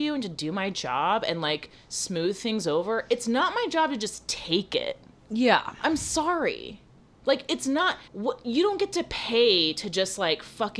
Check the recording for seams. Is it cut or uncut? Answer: cut